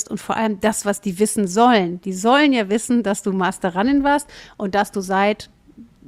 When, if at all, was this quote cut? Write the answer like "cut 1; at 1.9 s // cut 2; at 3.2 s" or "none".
none